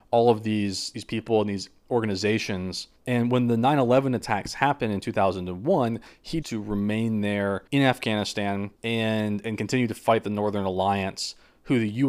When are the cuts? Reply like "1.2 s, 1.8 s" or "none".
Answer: 3.0 s, 6.4 s, 7.7 s, 8.7 s